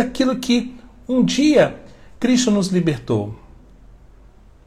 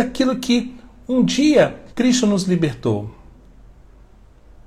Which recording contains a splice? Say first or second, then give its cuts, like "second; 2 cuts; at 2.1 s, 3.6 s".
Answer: second; 1 cut; at 1.9 s